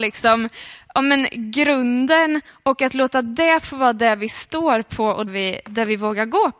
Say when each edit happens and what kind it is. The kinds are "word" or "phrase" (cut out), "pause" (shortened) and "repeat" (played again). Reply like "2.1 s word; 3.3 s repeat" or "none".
5.3 s word

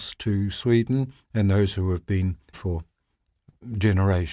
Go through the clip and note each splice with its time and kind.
2.5 s word

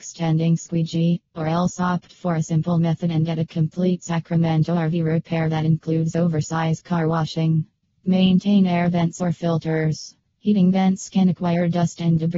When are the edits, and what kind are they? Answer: none

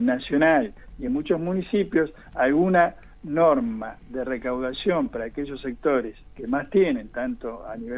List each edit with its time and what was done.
none

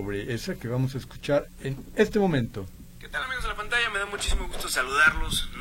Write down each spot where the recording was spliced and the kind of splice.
none

